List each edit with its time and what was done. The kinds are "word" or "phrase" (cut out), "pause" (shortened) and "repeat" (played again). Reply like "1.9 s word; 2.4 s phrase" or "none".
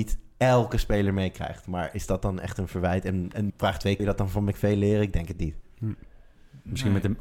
3.5 s word; 4.0 s word